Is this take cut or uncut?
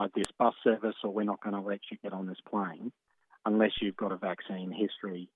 uncut